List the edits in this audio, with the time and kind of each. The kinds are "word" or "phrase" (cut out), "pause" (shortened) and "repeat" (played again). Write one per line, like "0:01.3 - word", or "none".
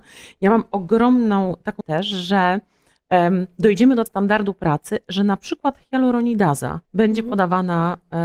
0:01.8 - word
0:04.1 - word
0:06.8 - pause